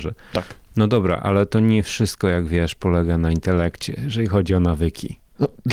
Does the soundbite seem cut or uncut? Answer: uncut